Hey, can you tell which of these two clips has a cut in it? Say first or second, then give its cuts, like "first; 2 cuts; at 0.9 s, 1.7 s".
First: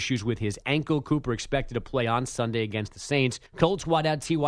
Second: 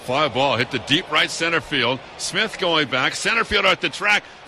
first; 1 cut; at 3.5 s